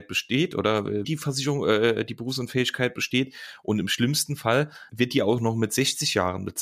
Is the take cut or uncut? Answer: cut